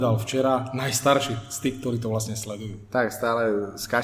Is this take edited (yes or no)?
no